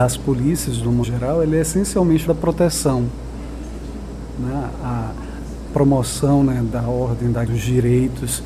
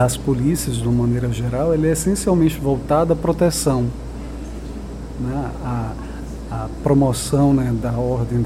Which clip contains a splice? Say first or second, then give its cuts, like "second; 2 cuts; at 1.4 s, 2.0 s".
first; 4 cuts; at 1.0 s, 2.3 s, 5.7 s, 7.5 s